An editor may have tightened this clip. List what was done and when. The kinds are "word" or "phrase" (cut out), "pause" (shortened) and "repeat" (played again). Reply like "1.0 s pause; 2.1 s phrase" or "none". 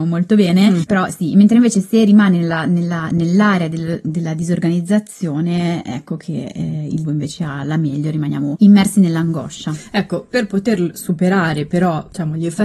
7.0 s word